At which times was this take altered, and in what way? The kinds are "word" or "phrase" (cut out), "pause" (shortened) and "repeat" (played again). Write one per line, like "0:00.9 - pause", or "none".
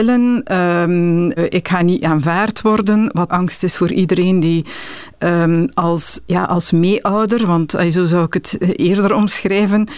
0:01.4 - word
0:03.3 - phrase
0:06.3 - word

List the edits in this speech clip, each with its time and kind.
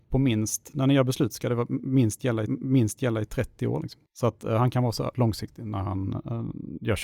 0:02.4 - repeat
0:05.1 - word

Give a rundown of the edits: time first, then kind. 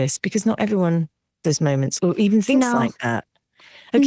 0:01.4 - word
0:02.0 - word

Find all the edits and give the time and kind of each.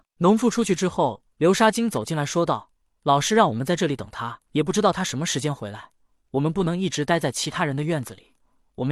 0:01.3 - pause
0:04.5 - pause

